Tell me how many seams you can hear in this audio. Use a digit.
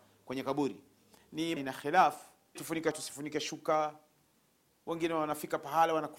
3